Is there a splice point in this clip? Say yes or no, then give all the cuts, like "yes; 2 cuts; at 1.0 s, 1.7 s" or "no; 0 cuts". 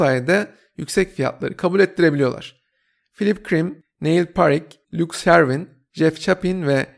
no; 0 cuts